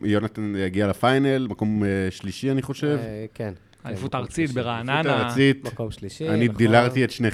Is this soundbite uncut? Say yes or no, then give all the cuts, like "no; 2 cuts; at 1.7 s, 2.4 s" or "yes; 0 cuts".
yes; 0 cuts